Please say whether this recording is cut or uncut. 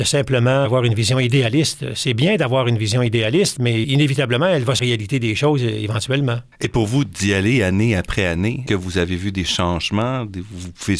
cut